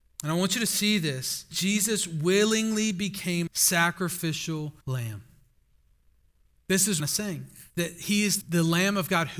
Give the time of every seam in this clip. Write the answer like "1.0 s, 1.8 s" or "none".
1.5 s, 3.5 s, 4.8 s, 7.0 s, 7.7 s, 8.4 s

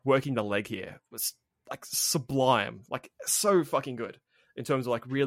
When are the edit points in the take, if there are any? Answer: none

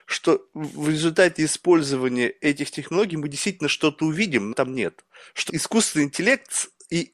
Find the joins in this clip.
4.5 s, 5.5 s

